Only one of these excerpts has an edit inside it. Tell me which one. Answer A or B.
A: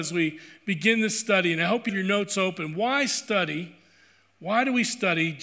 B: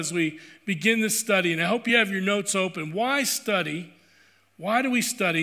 A